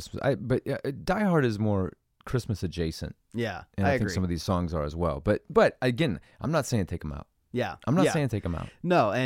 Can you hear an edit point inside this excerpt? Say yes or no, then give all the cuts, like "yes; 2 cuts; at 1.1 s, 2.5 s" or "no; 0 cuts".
no; 0 cuts